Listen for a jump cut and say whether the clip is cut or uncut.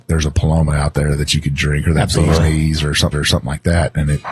cut